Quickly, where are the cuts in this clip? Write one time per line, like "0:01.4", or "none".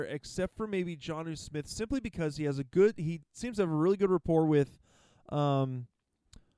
none